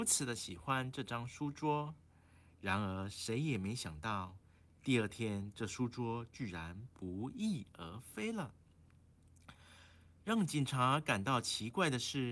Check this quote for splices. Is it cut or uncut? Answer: uncut